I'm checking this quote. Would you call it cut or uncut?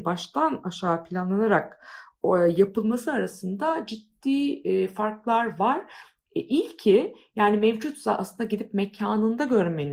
uncut